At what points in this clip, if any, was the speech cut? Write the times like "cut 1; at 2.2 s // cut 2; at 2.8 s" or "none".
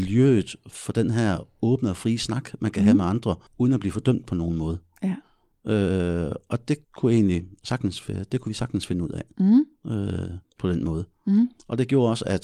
cut 1; at 3.5 s // cut 2; at 6.8 s // cut 3; at 10.4 s